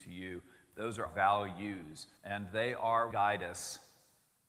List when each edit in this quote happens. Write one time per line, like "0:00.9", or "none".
0:01.1
0:02.2
0:03.1